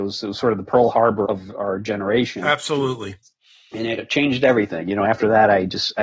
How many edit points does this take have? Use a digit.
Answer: 2